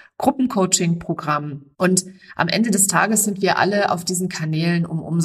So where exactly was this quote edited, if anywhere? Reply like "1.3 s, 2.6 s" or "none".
1.7 s